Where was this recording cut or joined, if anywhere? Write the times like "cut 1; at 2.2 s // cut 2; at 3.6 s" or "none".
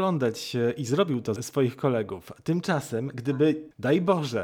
cut 1; at 1.4 s